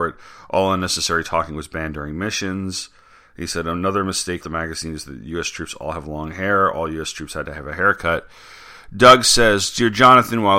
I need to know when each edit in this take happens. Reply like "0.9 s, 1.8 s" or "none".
4.4 s